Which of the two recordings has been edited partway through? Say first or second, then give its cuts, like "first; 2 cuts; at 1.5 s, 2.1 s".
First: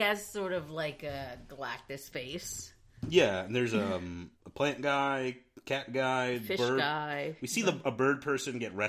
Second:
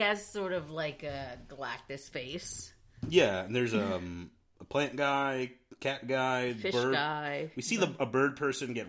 first; 1 cut; at 4.3 s